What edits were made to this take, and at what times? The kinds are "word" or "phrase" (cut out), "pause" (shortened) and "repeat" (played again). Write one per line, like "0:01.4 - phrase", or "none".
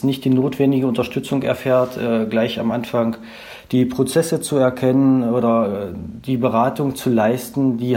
none